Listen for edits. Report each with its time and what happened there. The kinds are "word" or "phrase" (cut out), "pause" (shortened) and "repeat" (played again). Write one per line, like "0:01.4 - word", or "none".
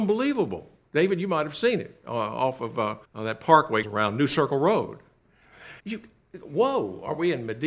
0:03.0 - pause
0:03.8 - word
0:05.8 - pause

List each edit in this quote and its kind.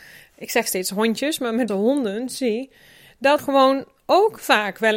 0:01.7 - word
0:03.4 - word

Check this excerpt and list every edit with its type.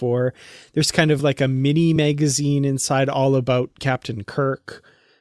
none

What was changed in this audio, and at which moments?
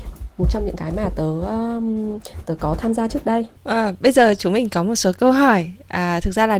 0:03.6 - pause

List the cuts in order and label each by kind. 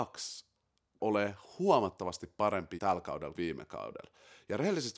0:01.0 - word
0:02.8 - word
0:03.3 - word

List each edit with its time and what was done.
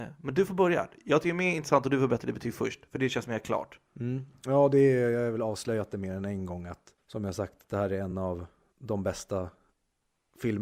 none

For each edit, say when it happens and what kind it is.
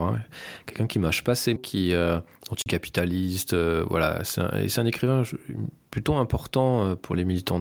0:01.6 - word

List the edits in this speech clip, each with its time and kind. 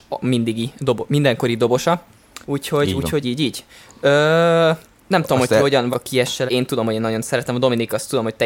0:02.4 - pause
0:03.2 - word
0:05.0 - pause
0:05.9 - word
0:06.5 - phrase

